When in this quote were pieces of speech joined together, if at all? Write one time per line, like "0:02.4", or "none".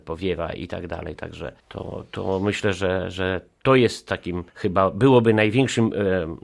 0:01.6
0:04.5